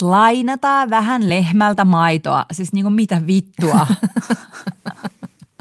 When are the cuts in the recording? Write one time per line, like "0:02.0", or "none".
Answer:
none